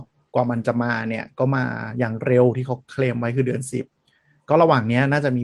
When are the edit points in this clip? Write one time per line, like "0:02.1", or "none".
none